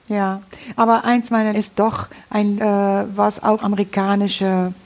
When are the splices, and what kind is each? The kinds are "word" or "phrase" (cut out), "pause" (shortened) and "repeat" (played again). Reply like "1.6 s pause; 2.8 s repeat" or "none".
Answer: 1.5 s word; 2.6 s word; 3.6 s word